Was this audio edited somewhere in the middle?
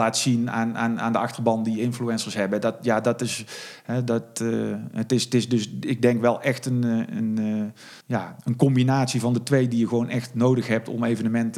yes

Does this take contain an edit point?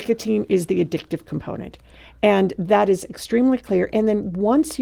no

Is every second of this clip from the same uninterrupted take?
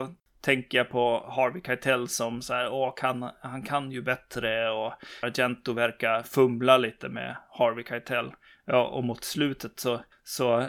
no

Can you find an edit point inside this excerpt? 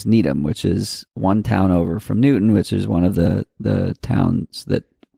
yes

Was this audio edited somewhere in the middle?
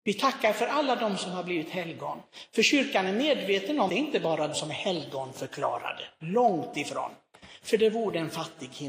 yes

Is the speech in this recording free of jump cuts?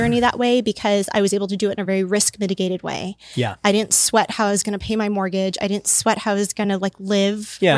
yes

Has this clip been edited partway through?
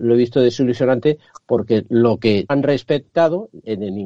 yes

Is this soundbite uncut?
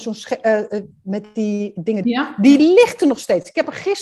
no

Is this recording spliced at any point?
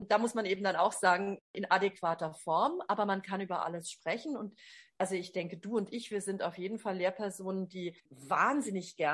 yes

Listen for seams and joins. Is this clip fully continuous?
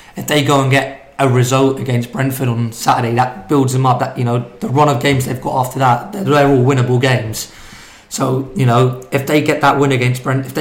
yes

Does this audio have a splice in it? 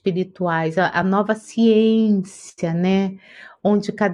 no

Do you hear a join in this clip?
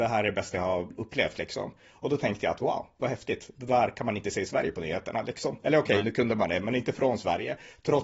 no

